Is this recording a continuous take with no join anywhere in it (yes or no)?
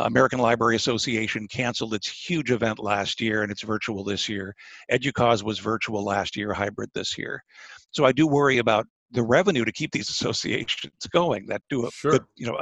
yes